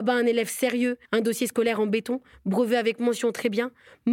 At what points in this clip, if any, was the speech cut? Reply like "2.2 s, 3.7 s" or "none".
1.1 s